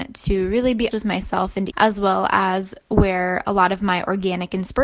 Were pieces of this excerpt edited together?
yes; 2 cuts; at 0.9 s, 1.7 s

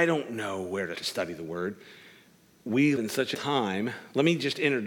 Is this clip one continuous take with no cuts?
no; 3 cuts; at 0.9 s, 3.0 s, 3.3 s

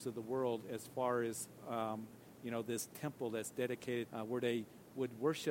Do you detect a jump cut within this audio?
yes; 1 cut; at 4.1 s

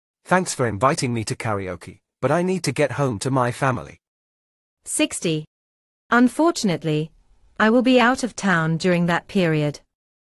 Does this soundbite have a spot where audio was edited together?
no; 0 cuts

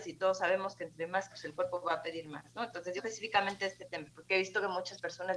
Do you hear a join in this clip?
yes; 2 cuts; at 1.3 s, 3.0 s

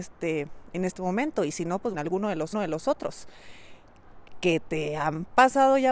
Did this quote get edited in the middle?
yes; 2 cuts; at 1.9 s, 2.5 s

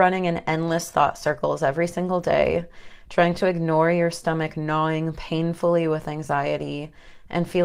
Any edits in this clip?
no; 0 cuts

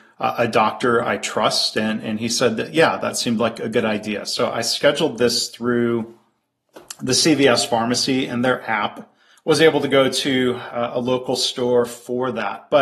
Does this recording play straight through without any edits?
no; 1 cut; at 9.2 s

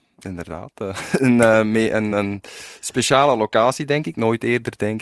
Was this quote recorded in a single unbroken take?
yes; 0 cuts

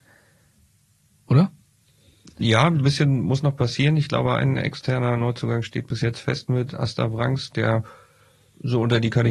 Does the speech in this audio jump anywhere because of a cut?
no; 0 cuts

